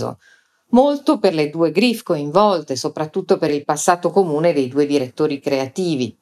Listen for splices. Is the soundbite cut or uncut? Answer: uncut